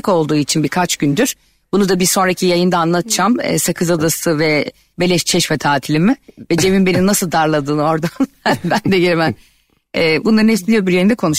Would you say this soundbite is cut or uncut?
uncut